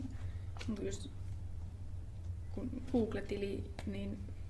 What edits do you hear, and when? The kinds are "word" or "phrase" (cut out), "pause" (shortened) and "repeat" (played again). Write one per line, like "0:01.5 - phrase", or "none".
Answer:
0:02.9 - word

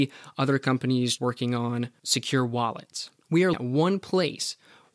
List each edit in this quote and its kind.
0:01.2 - word
0:03.5 - word

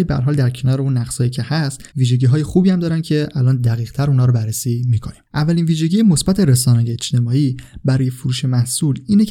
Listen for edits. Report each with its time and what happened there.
0:01.9 - pause
0:05.3 - pause

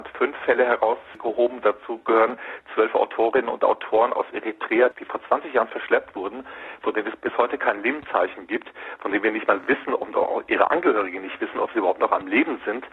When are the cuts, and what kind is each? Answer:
none

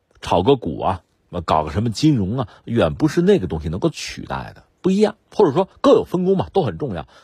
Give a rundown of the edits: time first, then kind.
0:04.7 - pause
0:05.2 - pause

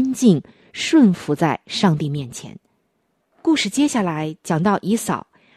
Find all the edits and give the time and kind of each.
0:03.0 - pause

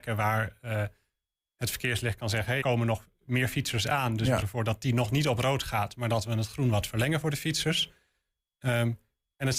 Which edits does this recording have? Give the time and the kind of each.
0:02.6 - word
0:04.4 - word

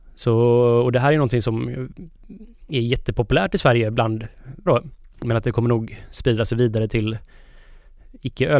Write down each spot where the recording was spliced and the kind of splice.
0:04.7 - word

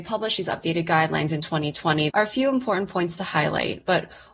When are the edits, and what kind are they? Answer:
0:02.1 - word

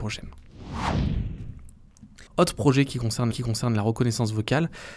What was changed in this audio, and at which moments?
0:02.3 - pause
0:03.3 - repeat

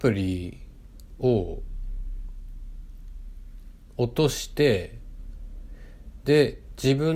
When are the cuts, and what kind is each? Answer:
none

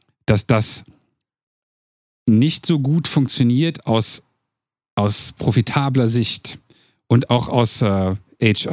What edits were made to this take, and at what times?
none

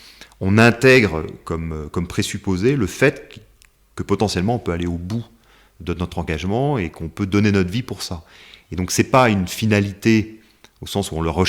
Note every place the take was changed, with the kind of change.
none

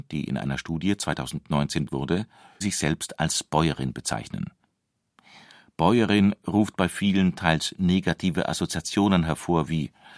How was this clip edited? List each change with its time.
0:01.9 - word
0:02.6 - word

